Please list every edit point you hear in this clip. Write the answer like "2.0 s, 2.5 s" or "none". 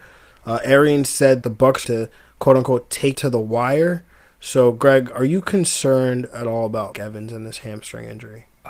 1.4 s, 1.8 s, 3.1 s, 6.9 s